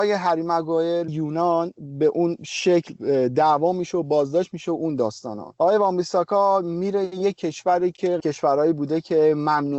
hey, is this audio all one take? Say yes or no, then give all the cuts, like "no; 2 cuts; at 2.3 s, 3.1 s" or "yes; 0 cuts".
no; 1 cut; at 1.1 s